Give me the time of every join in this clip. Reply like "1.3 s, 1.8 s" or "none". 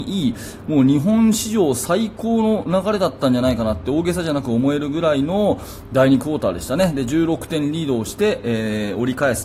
none